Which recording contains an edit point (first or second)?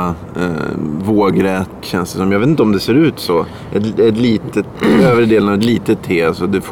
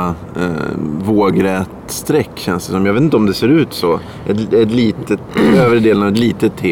first